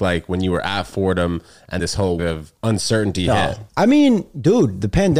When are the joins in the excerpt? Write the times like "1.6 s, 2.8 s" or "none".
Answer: 1.8 s, 2.2 s, 2.6 s, 3.7 s

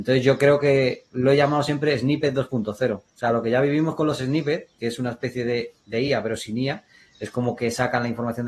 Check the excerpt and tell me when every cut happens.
none

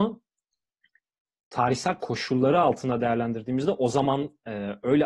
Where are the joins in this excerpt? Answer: none

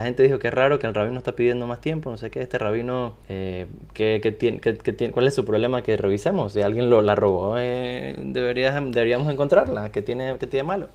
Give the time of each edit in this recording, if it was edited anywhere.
3.2 s

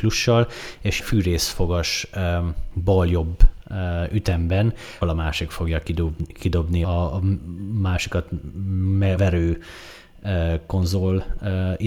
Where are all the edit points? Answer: 1.0 s, 5.0 s, 6.8 s, 9.2 s

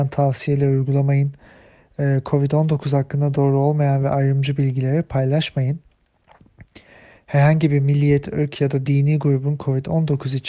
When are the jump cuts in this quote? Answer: none

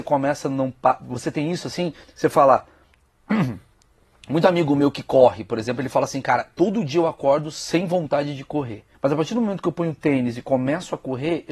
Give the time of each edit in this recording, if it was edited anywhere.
2.0 s, 8.9 s

